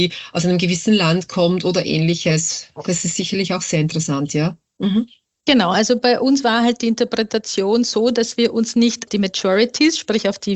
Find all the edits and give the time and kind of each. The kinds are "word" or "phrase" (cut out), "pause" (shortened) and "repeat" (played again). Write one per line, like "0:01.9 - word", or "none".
0:09.1 - word